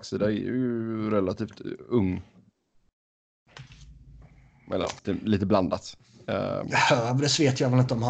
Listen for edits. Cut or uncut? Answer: cut